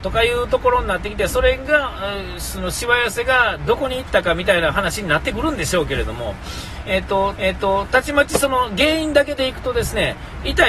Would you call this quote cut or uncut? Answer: cut